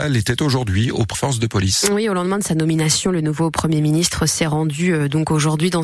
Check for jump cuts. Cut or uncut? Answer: cut